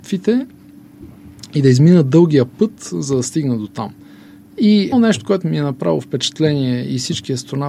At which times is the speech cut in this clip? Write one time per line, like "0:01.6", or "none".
0:04.9